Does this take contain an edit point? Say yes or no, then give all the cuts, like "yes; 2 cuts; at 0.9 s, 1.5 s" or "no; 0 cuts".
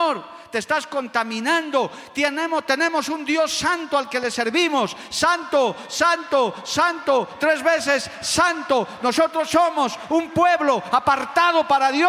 no; 0 cuts